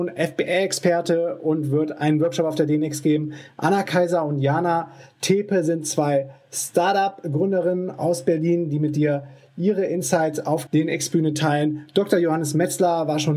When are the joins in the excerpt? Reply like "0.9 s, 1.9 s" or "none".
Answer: 10.7 s